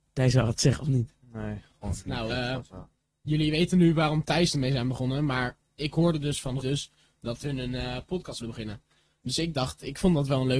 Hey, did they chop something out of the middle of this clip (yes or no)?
yes